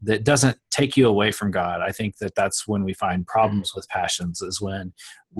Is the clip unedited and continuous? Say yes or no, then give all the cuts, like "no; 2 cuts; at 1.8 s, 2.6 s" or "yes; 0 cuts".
yes; 0 cuts